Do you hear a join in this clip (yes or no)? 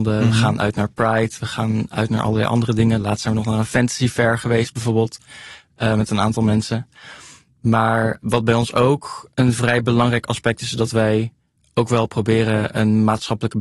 no